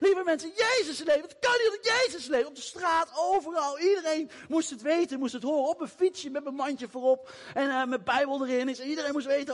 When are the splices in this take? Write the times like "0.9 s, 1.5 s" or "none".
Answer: none